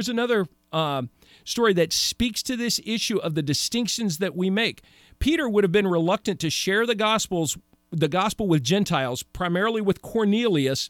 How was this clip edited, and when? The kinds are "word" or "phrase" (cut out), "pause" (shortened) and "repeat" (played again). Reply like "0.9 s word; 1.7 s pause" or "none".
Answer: none

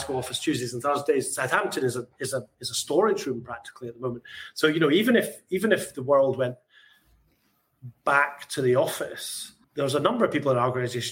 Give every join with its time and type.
9.6 s pause

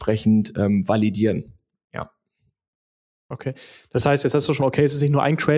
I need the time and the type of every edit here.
4.6 s word

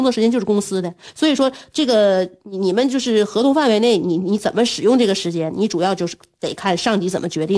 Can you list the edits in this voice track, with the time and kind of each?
none

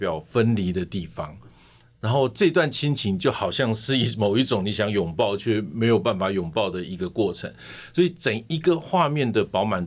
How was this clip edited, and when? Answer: none

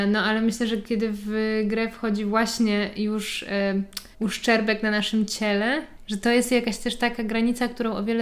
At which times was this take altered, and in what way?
4.1 s pause

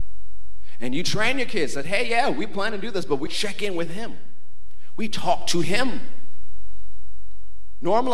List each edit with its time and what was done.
3.3 s word

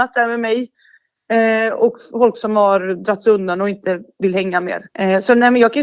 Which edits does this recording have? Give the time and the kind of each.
4.9 s pause

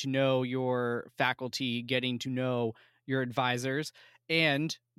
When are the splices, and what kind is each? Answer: none

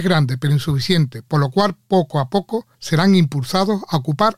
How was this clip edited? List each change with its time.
2.7 s pause

